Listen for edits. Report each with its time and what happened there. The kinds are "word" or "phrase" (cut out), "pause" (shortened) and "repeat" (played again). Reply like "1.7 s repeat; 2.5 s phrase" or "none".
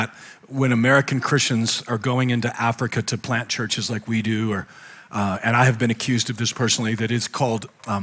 none